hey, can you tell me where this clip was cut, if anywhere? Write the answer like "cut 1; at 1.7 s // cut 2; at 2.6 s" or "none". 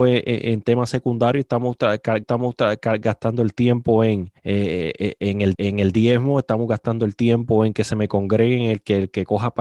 cut 1; at 2.2 s // cut 2; at 4.4 s // cut 3; at 5.5 s